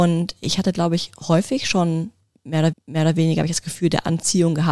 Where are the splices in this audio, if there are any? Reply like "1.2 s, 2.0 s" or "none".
2.7 s

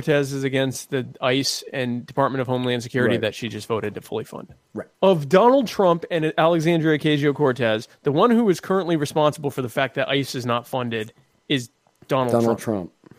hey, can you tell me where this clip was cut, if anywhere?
4.9 s

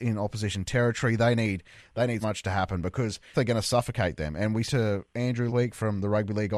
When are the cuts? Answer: 2.2 s, 3.3 s, 4.6 s, 5.5 s

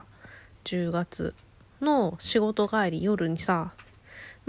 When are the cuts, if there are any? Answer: none

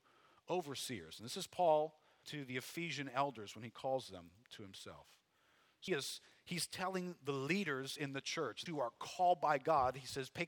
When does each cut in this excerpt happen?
2.2 s, 5.9 s, 8.7 s

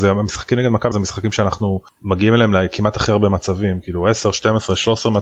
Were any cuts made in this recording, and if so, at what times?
0.9 s

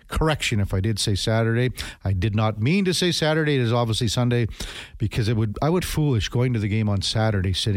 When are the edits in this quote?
5.8 s

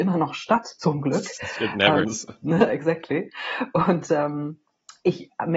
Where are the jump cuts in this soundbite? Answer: 2.0 s

